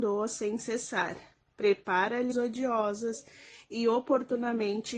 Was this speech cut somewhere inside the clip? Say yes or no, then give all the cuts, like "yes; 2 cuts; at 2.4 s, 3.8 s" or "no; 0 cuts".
yes; 1 cut; at 2.3 s